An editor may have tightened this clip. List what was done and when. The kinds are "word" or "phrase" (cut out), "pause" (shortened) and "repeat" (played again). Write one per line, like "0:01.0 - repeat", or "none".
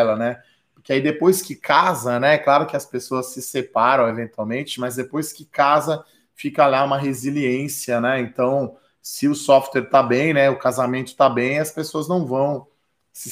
none

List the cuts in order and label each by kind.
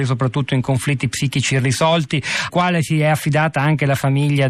0:02.5 - word

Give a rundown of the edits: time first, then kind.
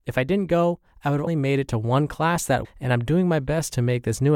0:01.3 - word
0:02.6 - word

